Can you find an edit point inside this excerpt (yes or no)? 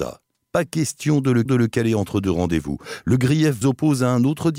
yes